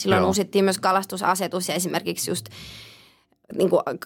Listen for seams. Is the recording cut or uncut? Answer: uncut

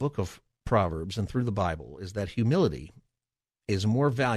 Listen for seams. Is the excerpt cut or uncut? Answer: uncut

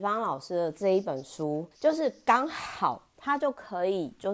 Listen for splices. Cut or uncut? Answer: cut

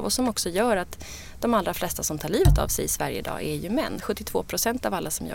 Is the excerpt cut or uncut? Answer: uncut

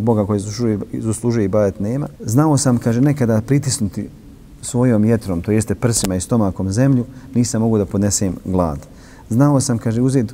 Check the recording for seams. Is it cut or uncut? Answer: cut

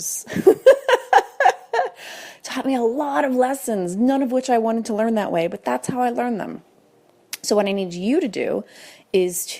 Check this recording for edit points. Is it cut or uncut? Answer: uncut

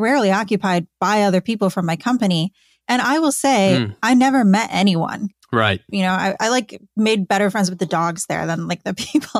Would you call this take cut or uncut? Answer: uncut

